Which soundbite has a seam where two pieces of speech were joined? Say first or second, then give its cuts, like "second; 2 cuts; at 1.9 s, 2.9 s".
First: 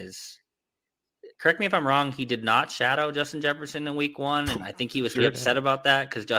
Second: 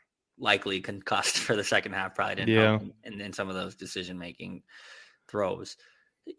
first; 2 cuts; at 1.3 s, 5.1 s